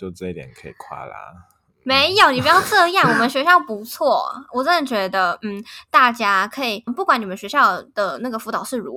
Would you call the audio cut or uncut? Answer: cut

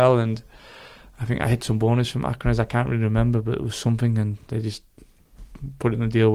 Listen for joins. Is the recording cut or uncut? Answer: uncut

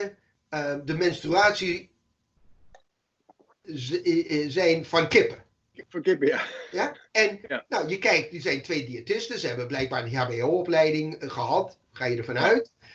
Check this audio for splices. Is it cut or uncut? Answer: cut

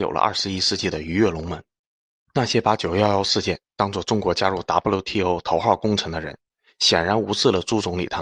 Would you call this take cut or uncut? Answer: uncut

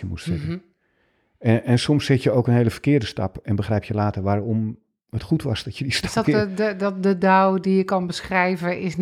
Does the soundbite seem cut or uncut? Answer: cut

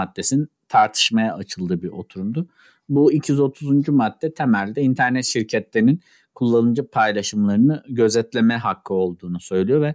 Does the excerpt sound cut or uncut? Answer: uncut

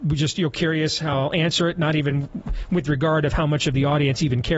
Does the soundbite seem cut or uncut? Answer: uncut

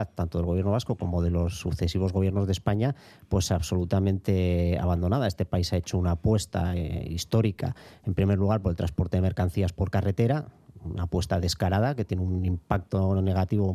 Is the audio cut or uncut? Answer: uncut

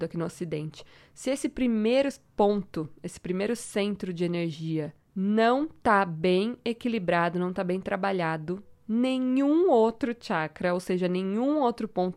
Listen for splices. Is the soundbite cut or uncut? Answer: uncut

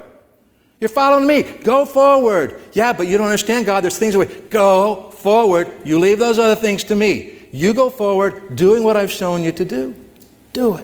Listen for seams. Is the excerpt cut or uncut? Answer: uncut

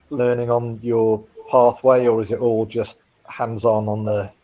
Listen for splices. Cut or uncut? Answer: uncut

